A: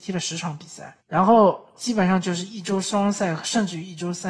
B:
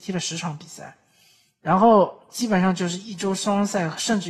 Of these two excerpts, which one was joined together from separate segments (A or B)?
A